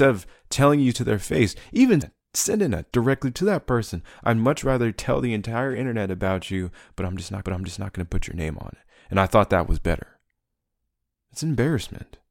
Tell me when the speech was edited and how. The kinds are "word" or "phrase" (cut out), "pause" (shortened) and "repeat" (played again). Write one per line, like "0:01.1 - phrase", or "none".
0:02.0 - word
0:02.9 - word
0:07.4 - repeat